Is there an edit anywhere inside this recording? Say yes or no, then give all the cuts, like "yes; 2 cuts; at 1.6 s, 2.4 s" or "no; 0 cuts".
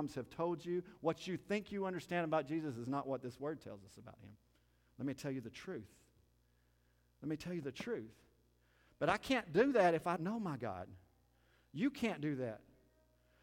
yes; 1 cut; at 10.2 s